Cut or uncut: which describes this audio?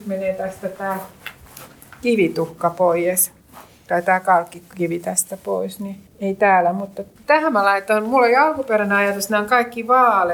uncut